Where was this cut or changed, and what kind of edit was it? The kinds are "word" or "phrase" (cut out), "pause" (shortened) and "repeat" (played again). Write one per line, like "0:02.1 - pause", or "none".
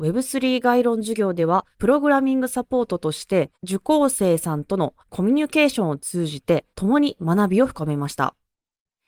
0:01.7 - pause
0:03.5 - pause
0:05.0 - pause
0:06.7 - pause